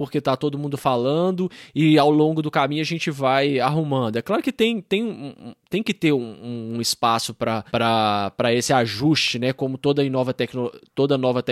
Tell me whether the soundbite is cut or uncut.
cut